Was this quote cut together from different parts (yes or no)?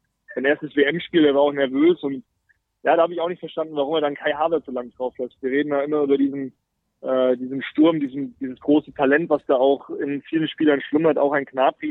no